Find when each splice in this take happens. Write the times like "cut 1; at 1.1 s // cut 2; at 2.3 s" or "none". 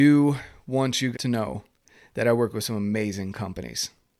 cut 1; at 1.1 s

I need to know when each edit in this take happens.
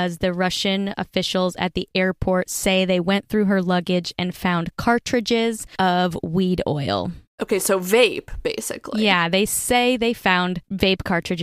none

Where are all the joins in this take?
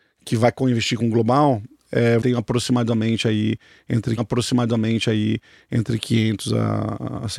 cut 1; at 2.2 s // cut 2; at 4.2 s

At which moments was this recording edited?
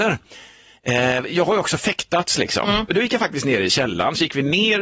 none

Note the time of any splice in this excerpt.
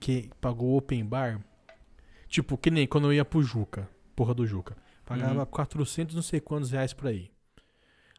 none

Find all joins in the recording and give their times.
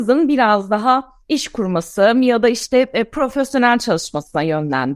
none

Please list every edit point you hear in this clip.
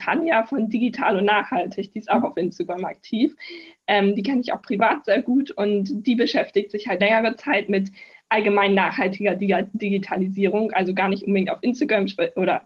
cut 1; at 7.0 s

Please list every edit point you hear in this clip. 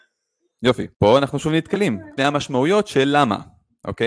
cut 1; at 0.9 s // cut 2; at 2.2 s

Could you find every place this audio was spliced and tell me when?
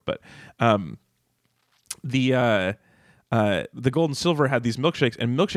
none

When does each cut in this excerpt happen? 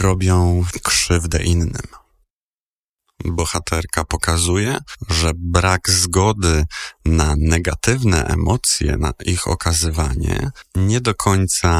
none

